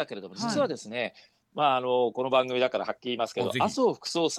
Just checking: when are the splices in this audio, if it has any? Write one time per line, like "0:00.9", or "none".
none